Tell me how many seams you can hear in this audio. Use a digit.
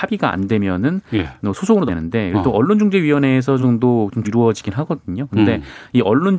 3